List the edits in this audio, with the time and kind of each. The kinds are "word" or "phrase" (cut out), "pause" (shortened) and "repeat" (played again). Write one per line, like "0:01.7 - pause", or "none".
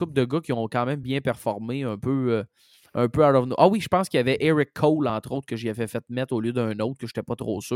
none